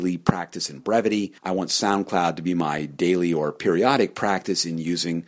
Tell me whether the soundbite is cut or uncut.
cut